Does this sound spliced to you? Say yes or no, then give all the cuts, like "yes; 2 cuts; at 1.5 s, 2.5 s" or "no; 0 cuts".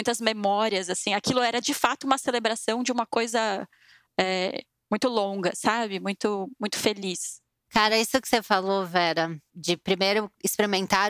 no; 0 cuts